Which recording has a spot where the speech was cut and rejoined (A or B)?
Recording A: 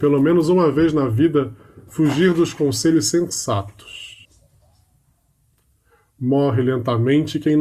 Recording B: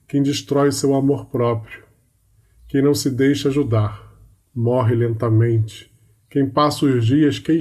B